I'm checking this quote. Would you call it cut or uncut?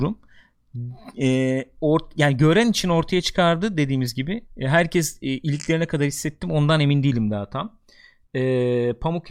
cut